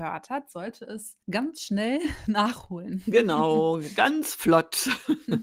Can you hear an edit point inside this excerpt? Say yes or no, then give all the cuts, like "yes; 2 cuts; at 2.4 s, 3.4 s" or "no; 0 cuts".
yes; 1 cut; at 1.2 s